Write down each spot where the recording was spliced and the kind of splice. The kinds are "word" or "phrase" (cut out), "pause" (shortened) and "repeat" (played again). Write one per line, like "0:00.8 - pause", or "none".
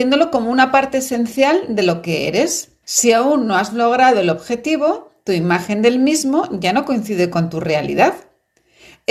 0:02.8 - pause